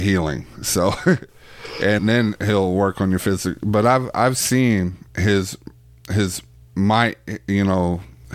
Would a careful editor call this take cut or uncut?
cut